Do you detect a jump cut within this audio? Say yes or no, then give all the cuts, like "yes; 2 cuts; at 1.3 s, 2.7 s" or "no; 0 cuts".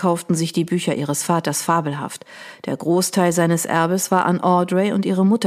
no; 0 cuts